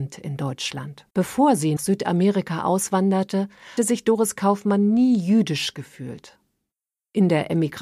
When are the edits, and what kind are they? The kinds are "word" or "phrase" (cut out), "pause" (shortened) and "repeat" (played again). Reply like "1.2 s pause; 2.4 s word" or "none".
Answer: 1.1 s pause; 1.8 s word; 3.8 s word